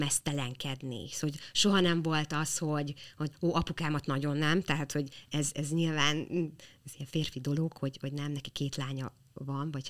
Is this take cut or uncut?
uncut